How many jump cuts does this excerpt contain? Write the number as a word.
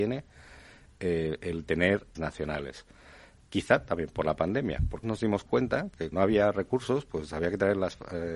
three